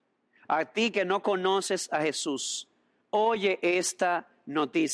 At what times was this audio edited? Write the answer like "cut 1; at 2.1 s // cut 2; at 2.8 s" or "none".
none